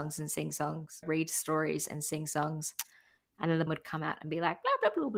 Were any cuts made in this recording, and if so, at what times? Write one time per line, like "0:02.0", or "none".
0:01.0
0:03.7